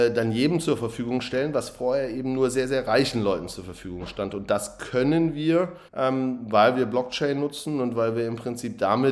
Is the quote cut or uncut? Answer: cut